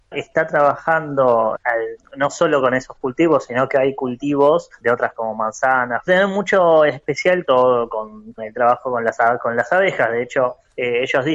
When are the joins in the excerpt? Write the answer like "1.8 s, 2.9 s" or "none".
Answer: 1.5 s, 4.8 s, 5.2 s, 6.1 s, 7.4 s, 8.4 s

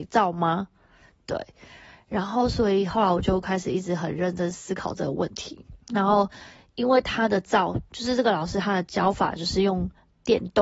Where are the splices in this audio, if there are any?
5.8 s

